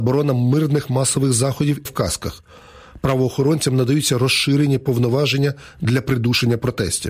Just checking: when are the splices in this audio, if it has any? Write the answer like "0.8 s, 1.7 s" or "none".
1.9 s